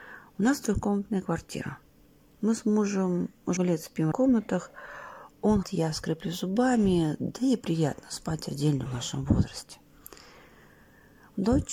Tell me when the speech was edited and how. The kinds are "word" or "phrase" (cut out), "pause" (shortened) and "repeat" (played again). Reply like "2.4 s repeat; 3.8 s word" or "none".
3.6 s word; 4.1 s word; 5.6 s word; 8.9 s word